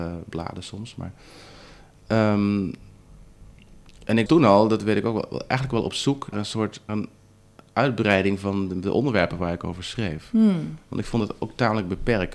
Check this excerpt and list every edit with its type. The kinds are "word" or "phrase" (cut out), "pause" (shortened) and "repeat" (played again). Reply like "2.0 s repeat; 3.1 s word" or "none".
4.3 s word; 6.3 s word; 6.9 s word